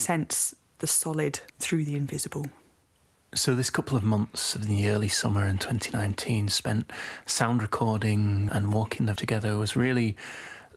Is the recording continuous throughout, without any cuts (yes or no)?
no